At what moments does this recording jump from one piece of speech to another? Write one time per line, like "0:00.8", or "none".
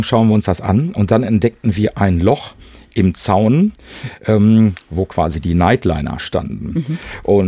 none